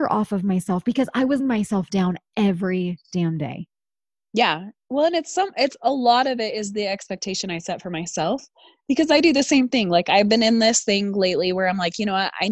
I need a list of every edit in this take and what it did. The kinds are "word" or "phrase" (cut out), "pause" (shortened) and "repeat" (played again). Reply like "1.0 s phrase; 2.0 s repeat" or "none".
1.4 s word